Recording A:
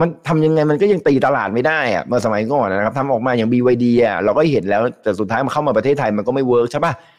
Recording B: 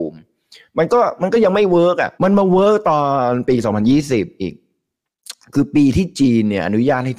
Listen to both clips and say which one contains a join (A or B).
B